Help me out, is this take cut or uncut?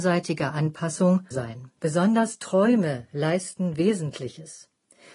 cut